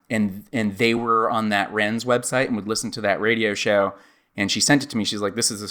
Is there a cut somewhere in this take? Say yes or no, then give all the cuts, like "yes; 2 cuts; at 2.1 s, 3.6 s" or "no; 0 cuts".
no; 0 cuts